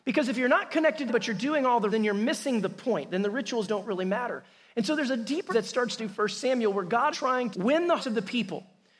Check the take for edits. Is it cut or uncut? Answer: cut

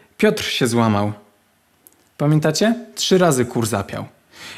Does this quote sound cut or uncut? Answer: uncut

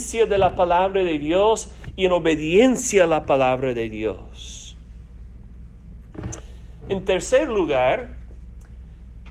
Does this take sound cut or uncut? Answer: uncut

